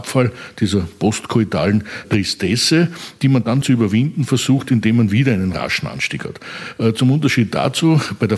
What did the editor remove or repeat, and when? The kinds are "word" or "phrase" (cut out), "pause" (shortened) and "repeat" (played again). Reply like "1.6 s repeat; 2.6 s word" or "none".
2.0 s word; 3.6 s word